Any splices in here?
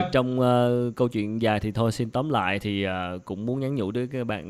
no; 0 cuts

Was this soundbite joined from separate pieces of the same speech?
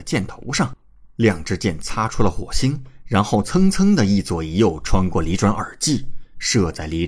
no; 0 cuts

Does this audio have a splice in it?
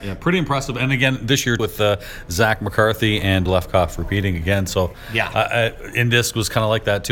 yes; 2 cuts; at 1.6 s, 3.5 s

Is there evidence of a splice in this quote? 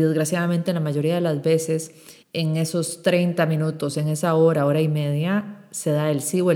yes; 1 cut; at 2.2 s

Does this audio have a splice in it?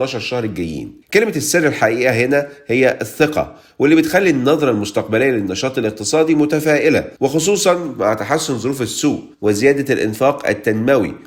yes; 3 cuts; at 1.0 s, 7.2 s, 9.3 s

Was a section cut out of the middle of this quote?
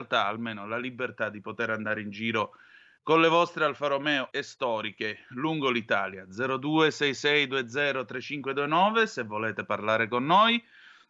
yes; 1 cut; at 4.3 s

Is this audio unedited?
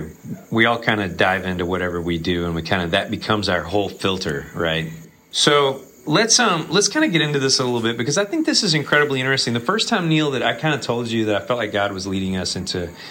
yes; 0 cuts

